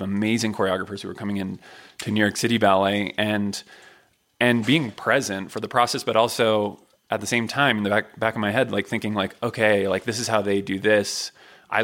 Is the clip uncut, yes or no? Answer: yes